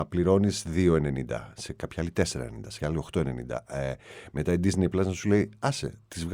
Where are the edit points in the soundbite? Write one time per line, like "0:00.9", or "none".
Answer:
0:02.8